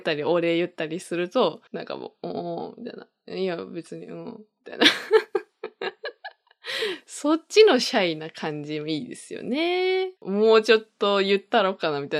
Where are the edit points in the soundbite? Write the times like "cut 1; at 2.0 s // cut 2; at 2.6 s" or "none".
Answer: cut 1; at 1.7 s // cut 2; at 10.2 s